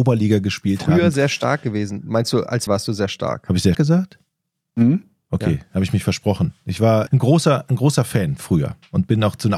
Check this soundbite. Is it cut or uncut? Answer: cut